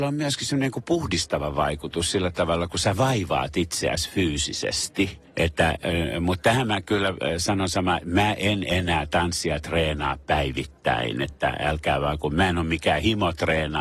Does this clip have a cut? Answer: no; 0 cuts

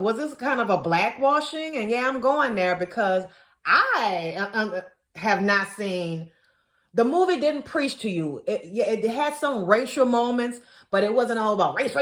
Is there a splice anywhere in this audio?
no; 0 cuts

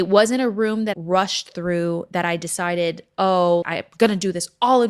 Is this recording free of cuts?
no; 2 cuts; at 0.9 s, 3.6 s

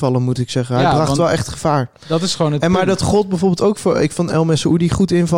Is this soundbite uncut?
yes; 0 cuts

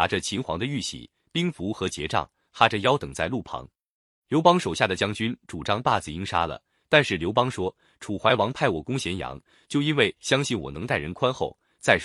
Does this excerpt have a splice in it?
no; 0 cuts

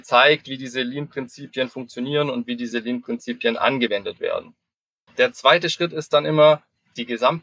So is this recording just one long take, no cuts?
yes; 0 cuts

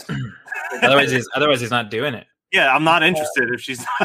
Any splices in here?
no; 0 cuts

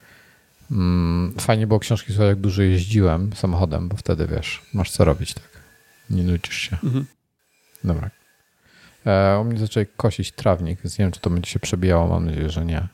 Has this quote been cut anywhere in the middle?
no; 0 cuts

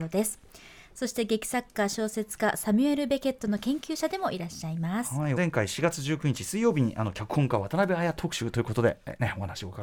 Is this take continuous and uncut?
no; 1 cut; at 5.4 s

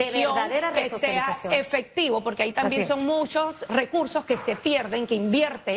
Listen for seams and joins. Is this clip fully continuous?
no; 1 cut; at 3.7 s

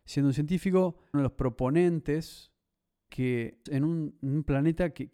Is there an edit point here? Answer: yes; 3 cuts; at 1.1 s, 3.1 s, 3.7 s

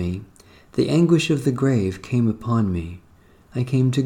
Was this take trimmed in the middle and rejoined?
no; 0 cuts

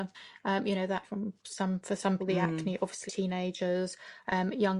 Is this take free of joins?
no; 4 cuts; at 1.0 s, 1.4 s, 2.2 s, 3.1 s

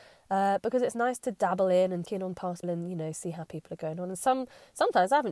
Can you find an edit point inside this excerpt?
yes; 2 cuts; at 2.0 s, 2.6 s

